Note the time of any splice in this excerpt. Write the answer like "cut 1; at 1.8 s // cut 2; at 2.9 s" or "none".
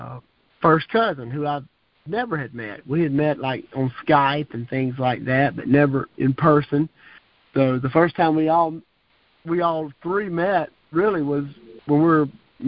none